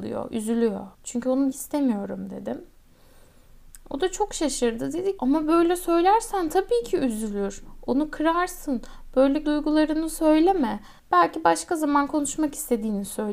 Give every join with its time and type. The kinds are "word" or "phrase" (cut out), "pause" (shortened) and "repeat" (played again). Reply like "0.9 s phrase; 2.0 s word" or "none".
0.9 s pause; 1.5 s word; 5.2 s word; 9.4 s word; 11.0 s pause

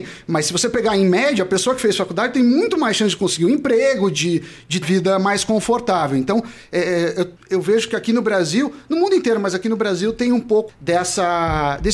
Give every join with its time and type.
4.8 s phrase; 7.4 s pause; 10.7 s word

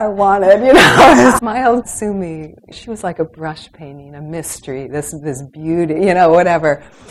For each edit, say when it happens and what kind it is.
1.4 s word; 1.8 s word; 2.7 s word

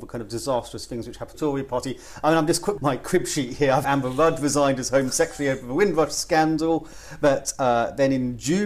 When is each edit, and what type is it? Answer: 1.3 s phrase; 2.8 s phrase; 3.8 s phrase

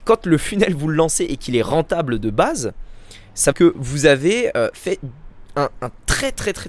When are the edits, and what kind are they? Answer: 3.5 s phrase

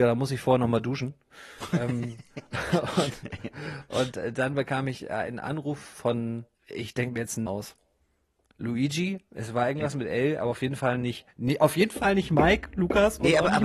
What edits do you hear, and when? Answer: 6.5 s pause; 7.5 s word

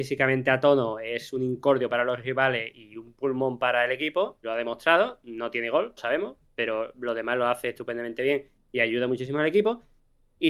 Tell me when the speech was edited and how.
4.4 s word; 6.0 s phrase

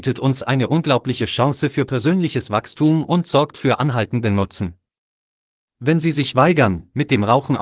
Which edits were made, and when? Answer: none

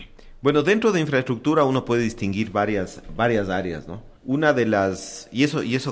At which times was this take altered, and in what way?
4.2 s pause

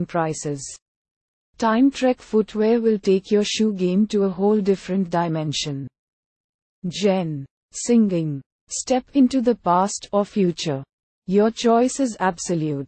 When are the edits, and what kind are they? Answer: none

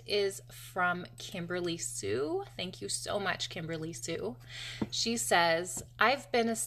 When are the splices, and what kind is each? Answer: none

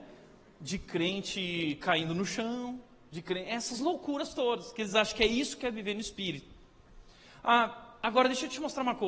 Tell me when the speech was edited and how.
none

